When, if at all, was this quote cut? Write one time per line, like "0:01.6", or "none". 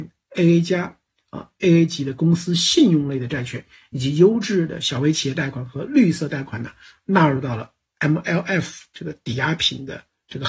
none